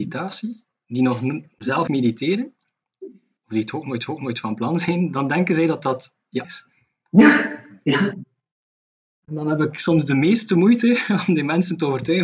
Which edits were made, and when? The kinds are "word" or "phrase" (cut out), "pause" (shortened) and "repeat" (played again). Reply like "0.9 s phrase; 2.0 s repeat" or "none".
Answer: 1.9 s word; 4.1 s repeat; 6.4 s word